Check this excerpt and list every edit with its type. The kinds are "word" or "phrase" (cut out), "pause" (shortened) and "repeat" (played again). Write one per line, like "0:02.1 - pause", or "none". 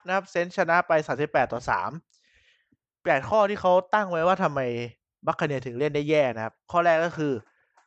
none